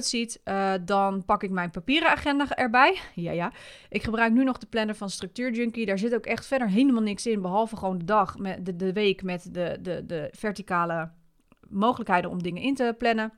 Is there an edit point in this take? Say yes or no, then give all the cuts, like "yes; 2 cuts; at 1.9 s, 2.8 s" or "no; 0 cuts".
no; 0 cuts